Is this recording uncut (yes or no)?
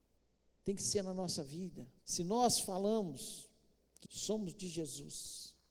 no